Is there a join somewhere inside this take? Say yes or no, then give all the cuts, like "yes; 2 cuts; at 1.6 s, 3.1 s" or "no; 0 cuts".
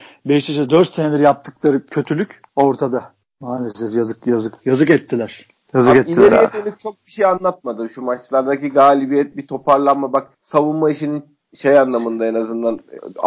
yes; 2 cuts; at 2.5 s, 10.3 s